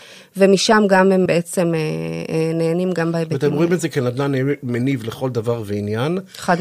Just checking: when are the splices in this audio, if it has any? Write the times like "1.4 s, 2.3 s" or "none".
1.3 s